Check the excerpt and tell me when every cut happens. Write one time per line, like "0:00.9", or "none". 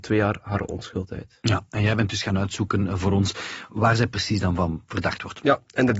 none